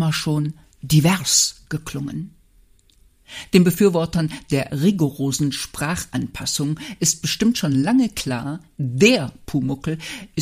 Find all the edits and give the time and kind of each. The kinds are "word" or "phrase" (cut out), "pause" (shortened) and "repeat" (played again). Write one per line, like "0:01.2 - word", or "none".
none